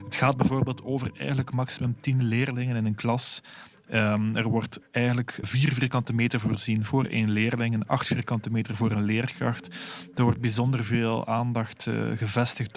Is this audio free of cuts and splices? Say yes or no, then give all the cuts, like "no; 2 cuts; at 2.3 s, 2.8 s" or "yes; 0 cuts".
no; 1 cut; at 5.4 s